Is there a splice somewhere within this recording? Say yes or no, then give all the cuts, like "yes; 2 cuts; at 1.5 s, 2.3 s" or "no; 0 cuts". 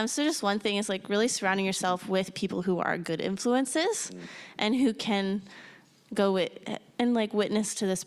no; 0 cuts